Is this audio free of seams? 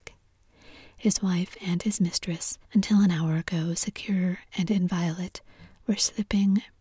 no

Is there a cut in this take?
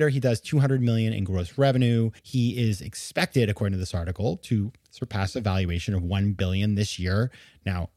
yes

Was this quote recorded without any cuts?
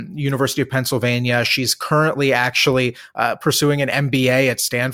yes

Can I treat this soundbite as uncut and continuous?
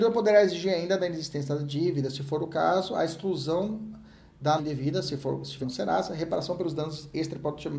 no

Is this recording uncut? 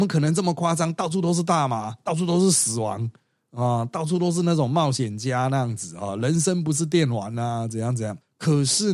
yes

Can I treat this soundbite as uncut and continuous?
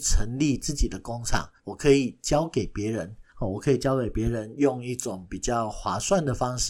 no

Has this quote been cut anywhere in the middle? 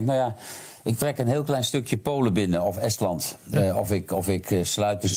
no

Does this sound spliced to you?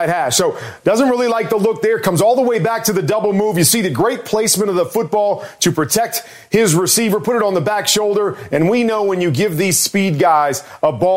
no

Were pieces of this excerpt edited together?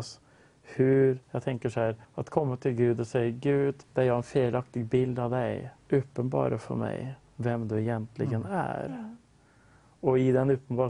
yes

